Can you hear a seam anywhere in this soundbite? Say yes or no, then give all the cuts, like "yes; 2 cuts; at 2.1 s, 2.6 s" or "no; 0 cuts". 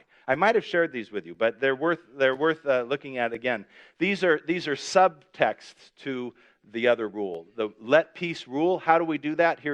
no; 0 cuts